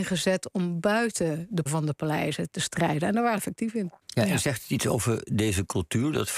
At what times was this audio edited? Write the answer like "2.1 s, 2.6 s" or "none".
1.7 s, 3.4 s, 4.0 s